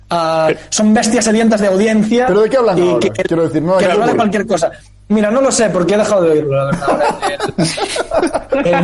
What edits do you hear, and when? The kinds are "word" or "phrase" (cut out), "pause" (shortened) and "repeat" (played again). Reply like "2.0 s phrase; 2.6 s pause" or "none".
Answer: none